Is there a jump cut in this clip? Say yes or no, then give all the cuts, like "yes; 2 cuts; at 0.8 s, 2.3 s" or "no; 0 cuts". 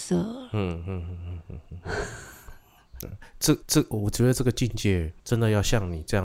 yes; 1 cut; at 3.6 s